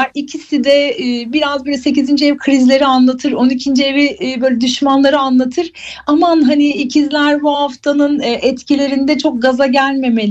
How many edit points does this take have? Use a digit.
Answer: 0